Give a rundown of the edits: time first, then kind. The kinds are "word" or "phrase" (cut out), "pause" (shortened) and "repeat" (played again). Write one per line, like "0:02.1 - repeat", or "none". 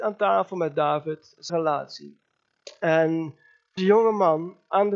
0:01.5 - word
0:03.8 - word